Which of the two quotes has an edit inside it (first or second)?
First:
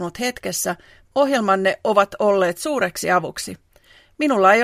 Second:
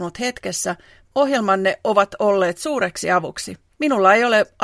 second